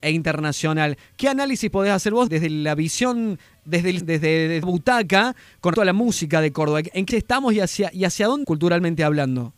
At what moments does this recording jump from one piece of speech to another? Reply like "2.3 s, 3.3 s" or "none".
2.3 s, 4.0 s, 4.6 s, 5.7 s, 7.1 s, 8.4 s